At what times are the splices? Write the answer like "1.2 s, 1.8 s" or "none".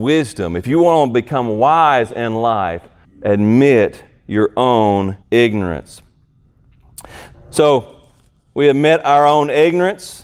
3.0 s, 5.2 s